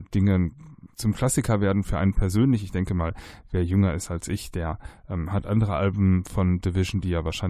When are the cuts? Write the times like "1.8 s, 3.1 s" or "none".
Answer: none